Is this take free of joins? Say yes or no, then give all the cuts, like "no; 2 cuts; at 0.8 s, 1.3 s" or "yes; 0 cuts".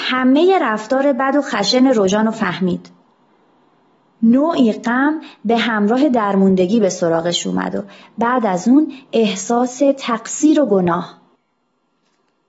yes; 0 cuts